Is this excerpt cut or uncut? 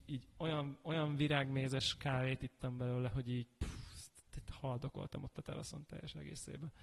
uncut